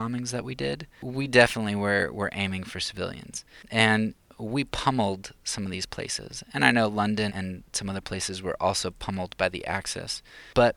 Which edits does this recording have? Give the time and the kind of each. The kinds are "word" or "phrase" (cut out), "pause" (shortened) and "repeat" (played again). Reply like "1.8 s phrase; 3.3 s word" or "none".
7.3 s word